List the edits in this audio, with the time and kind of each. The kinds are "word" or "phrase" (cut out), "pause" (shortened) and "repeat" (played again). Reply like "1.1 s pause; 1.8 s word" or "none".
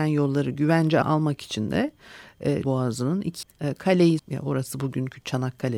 1.0 s word; 2.6 s word; 3.4 s word; 4.2 s word

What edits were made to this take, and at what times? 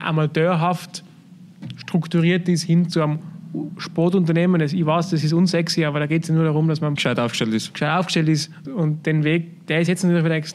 7.0 s word; 8.6 s word

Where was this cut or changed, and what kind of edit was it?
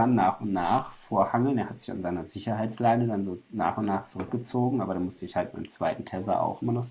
none

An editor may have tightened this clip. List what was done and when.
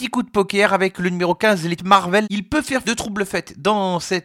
1.8 s word; 2.8 s word

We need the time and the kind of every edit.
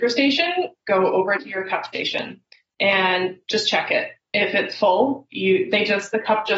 none

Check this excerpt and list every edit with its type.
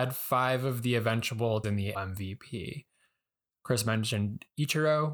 1.6 s phrase; 1.9 s word

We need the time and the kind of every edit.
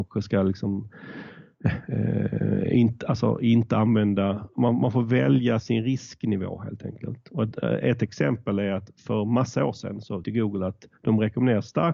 10.2 s word

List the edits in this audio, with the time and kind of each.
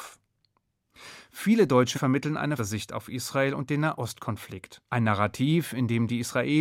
1.9 s word; 2.6 s word; 4.9 s pause

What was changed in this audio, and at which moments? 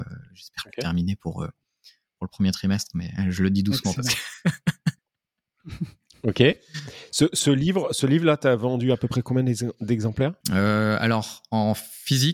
5.0 s pause; 10.4 s pause

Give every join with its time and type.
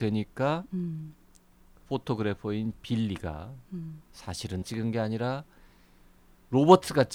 4.6 s word

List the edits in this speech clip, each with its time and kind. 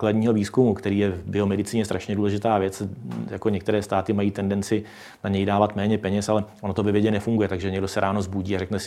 none

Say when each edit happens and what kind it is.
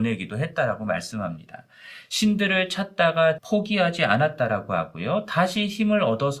3.4 s word

